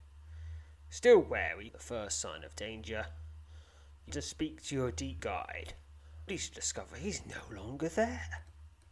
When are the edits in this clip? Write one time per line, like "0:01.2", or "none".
0:01.7
0:04.1
0:05.2
0:06.3